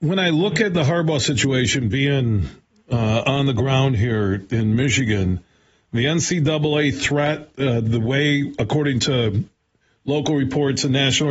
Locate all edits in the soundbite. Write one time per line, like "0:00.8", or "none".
none